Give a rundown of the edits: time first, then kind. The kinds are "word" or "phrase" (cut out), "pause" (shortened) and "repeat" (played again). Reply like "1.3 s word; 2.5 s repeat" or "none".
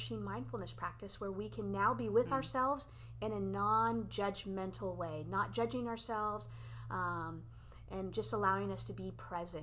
none